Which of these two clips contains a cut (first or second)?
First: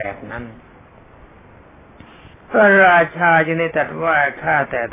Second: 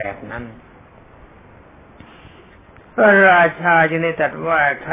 first